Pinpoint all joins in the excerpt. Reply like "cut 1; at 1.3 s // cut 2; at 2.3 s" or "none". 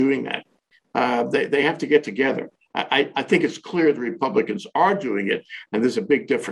none